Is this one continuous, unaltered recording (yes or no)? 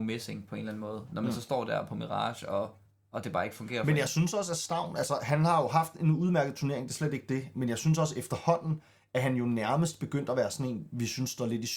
yes